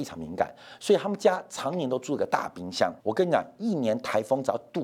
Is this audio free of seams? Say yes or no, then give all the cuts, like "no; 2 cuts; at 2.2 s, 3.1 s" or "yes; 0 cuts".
no; 1 cut; at 3.0 s